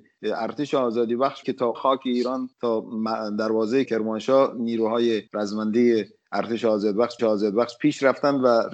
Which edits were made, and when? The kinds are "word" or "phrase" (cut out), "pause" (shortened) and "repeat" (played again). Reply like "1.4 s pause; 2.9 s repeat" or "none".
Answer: 1.4 s word; 1.7 s word; 2.5 s pause; 3.8 s word; 5.3 s pause; 7.2 s repeat